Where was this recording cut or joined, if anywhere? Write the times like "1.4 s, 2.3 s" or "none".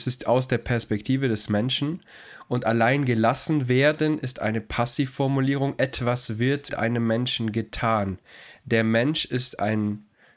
6.7 s